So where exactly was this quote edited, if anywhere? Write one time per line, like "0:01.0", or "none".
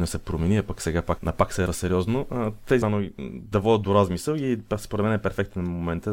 0:01.2
0:01.7
0:02.8
0:03.5